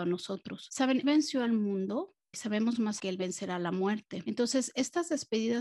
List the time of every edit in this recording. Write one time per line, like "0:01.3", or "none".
0:01.0
0:02.3
0:03.0